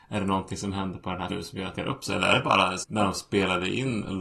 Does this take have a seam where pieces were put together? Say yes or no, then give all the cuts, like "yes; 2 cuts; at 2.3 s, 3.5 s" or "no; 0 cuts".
yes; 3 cuts; at 1.3 s, 1.8 s, 2.8 s